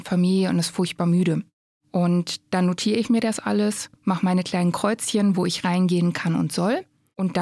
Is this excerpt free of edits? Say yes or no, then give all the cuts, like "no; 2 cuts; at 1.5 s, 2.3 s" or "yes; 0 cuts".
yes; 0 cuts